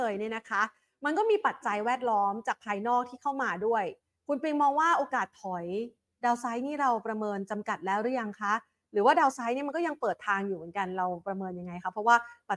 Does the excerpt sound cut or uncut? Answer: uncut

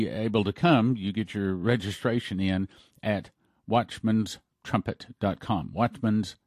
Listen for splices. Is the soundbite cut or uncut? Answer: uncut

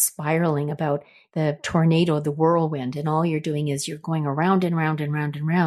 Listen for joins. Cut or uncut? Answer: uncut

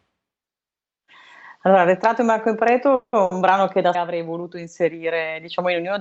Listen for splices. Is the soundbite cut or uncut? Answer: cut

